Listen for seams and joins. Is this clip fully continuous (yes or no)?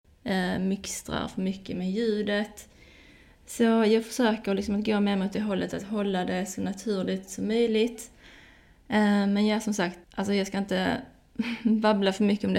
no